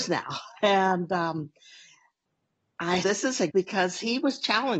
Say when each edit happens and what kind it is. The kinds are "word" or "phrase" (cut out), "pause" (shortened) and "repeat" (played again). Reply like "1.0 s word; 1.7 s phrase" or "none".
3.0 s word; 3.5 s word